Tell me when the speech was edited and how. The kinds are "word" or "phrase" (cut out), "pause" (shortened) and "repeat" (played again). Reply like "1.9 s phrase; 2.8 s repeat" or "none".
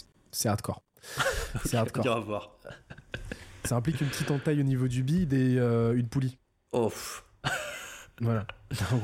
none